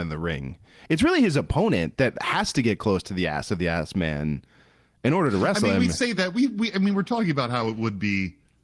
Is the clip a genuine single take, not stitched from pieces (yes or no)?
yes